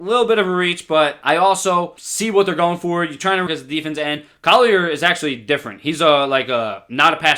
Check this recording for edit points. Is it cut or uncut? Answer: cut